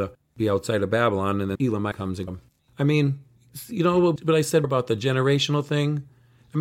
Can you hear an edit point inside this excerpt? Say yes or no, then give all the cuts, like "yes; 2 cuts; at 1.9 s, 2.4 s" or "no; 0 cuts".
yes; 5 cuts; at 1.6 s, 1.9 s, 2.3 s, 4.2 s, 4.6 s